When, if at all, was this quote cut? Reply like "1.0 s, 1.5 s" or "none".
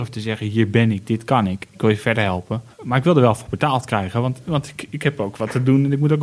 2.7 s